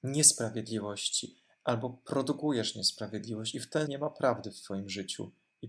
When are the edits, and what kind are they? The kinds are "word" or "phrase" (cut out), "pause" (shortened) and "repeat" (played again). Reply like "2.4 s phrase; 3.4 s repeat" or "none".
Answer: 3.9 s word